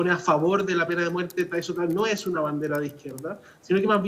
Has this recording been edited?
no; 0 cuts

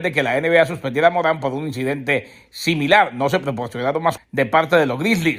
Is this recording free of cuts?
no; 1 cut; at 4.2 s

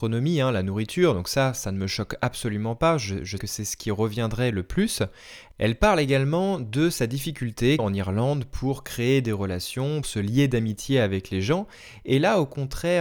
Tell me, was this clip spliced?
yes; 3 cuts; at 3.4 s, 7.8 s, 10.0 s

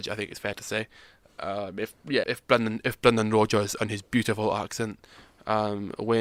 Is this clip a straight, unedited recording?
no; 1 cut; at 2.2 s

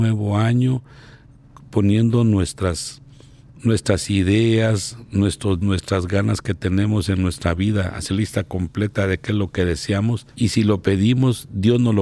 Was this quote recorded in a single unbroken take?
no; 3 cuts; at 5.6 s, 8.1 s, 10.3 s

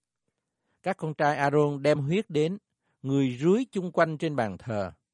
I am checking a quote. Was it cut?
no; 0 cuts

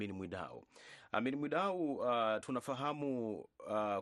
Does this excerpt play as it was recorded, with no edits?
yes; 0 cuts

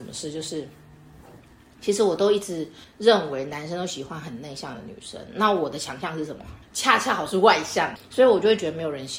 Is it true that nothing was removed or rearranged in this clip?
no; 3 cuts; at 2.8 s, 6.6 s, 8.0 s

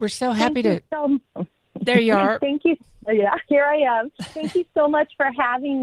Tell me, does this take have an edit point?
no; 0 cuts

